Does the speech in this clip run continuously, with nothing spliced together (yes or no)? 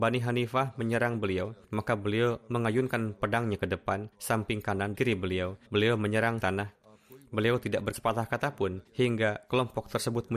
no